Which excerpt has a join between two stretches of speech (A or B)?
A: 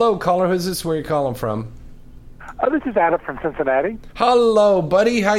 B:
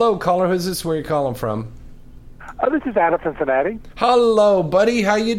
B